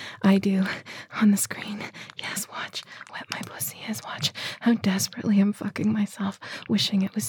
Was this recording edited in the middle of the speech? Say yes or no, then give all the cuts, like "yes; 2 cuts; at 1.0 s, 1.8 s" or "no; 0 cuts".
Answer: yes; 1 cut; at 3.1 s